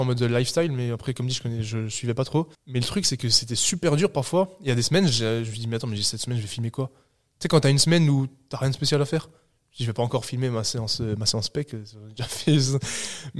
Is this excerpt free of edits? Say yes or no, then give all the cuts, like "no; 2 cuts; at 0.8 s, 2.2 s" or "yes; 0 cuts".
no; 1 cut; at 2.5 s